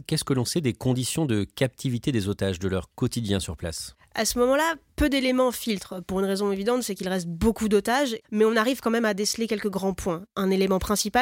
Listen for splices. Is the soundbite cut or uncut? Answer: cut